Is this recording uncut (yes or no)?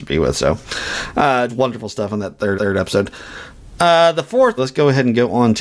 no